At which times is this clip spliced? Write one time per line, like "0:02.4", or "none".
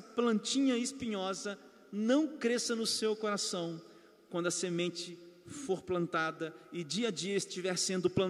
none

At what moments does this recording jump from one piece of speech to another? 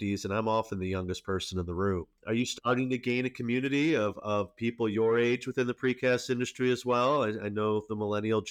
none

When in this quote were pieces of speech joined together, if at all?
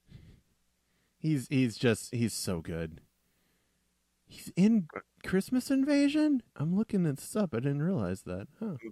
0:06.5

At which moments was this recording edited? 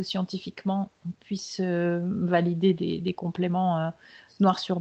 none

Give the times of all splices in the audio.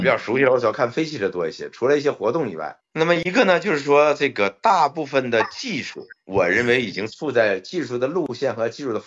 0:02.8

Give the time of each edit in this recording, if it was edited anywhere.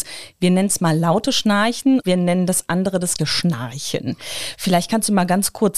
0:02.0
0:03.2

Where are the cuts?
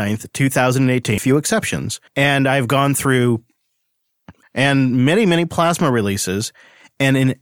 0:01.2
0:02.1
0:04.4

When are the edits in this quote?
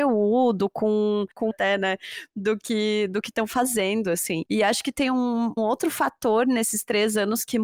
0:01.5
0:05.6

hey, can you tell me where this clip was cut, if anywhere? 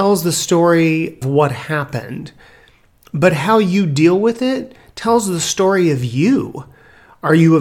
0:01.2

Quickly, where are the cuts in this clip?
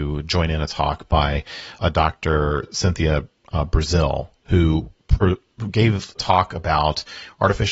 0:01.8
0:06.2

